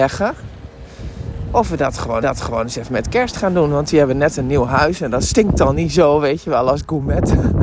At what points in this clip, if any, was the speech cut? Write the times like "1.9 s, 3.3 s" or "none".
2.2 s